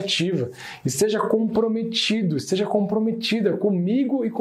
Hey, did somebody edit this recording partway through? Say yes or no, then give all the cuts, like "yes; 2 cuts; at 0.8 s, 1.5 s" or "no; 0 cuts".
no; 0 cuts